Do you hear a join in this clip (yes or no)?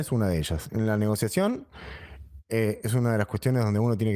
no